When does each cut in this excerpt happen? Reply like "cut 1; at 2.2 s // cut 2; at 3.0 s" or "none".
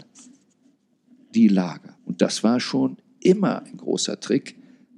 cut 1; at 2.0 s